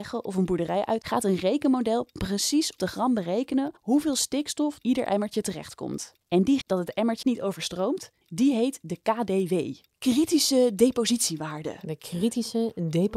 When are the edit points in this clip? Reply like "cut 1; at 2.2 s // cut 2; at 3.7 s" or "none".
cut 1; at 1.0 s // cut 2; at 2.8 s // cut 3; at 3.8 s // cut 4; at 4.8 s // cut 5; at 6.2 s // cut 6; at 6.6 s // cut 7; at 7.2 s // cut 8; at 8.2 s